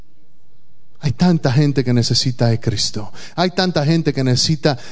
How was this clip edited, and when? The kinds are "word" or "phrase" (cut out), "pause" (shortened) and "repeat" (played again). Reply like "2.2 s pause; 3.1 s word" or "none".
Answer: none